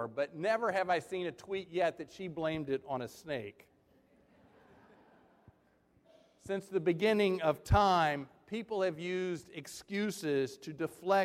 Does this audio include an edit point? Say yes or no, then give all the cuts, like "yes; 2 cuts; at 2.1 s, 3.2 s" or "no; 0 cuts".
no; 0 cuts